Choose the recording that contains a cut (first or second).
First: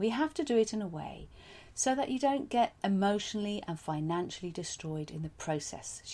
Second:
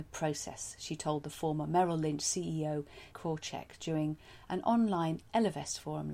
second